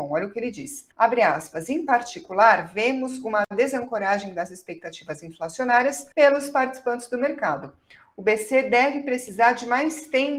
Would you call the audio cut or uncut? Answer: cut